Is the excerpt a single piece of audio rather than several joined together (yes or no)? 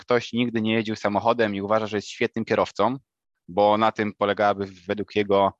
yes